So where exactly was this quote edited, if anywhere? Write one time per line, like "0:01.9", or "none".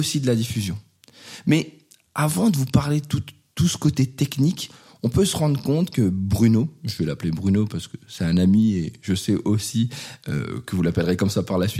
none